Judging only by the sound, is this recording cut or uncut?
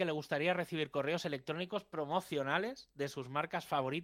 uncut